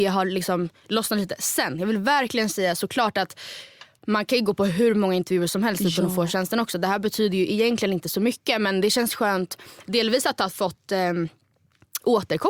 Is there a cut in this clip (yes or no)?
no